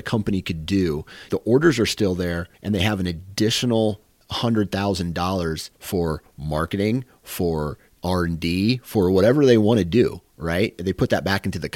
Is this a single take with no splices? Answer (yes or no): no